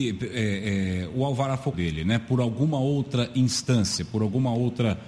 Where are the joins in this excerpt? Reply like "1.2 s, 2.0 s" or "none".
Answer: 1.7 s